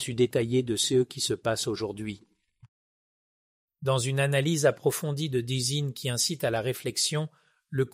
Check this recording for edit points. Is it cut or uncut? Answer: uncut